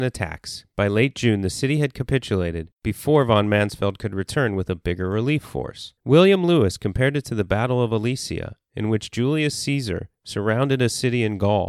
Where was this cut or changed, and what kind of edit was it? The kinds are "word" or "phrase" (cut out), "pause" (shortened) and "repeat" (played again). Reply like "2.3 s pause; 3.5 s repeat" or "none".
6.0 s pause